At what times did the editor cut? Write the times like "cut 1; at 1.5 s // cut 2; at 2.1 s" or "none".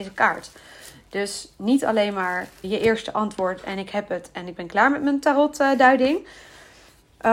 cut 1; at 2.6 s